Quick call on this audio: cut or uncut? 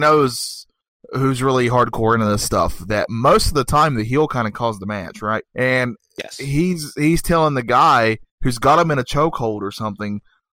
cut